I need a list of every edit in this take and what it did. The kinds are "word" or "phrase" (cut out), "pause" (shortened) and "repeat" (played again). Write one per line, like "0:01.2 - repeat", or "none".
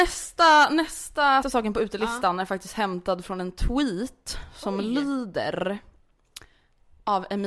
0:01.4 - phrase